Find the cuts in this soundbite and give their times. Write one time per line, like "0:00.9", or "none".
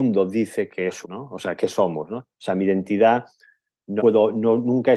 0:01.0
0:01.6
0:04.0